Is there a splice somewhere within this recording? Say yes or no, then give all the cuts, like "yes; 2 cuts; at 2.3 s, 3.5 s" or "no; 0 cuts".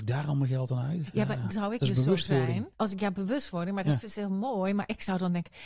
yes; 2 cuts; at 1.5 s, 2.7 s